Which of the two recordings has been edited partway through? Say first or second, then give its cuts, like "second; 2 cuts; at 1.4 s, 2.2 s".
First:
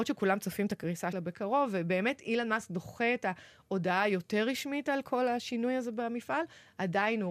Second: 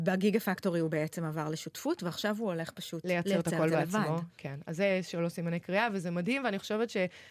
first; 1 cut; at 1.1 s